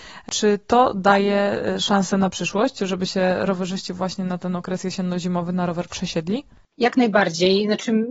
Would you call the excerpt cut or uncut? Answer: uncut